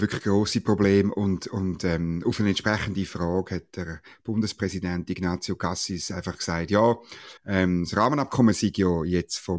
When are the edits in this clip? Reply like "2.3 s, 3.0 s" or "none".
7.4 s

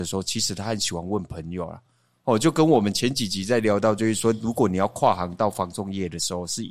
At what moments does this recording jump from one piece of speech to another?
none

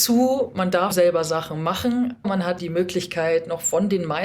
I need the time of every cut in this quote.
0.9 s, 2.2 s, 2.6 s

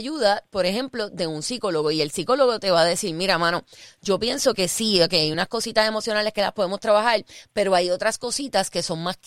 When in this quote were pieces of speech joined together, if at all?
none

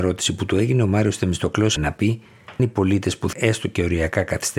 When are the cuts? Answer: 1.8 s, 2.6 s, 3.3 s

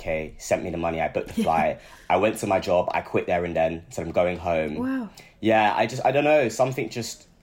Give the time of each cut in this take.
none

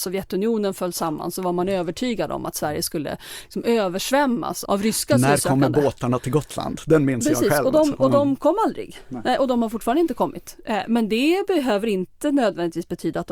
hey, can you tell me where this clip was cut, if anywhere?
4.7 s

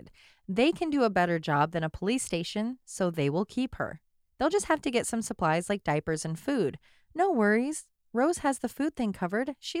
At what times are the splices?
none

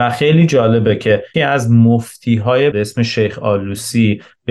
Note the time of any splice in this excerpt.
1.3 s, 2.7 s

